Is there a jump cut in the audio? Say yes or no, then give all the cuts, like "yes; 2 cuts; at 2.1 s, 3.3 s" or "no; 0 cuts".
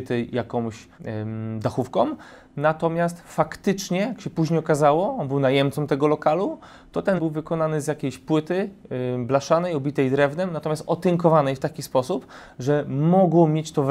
yes; 2 cuts; at 0.9 s, 7.2 s